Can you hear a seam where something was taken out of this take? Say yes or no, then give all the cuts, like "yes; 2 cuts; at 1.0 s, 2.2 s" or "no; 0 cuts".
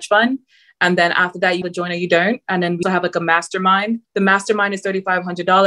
yes; 3 cuts; at 1.6 s, 2.8 s, 4.0 s